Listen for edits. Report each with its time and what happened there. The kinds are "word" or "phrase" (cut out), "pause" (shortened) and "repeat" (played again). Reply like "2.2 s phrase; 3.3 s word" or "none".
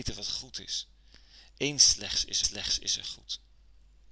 2.4 s repeat